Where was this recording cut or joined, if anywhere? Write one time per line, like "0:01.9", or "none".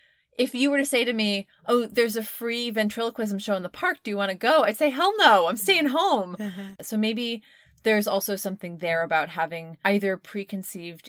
none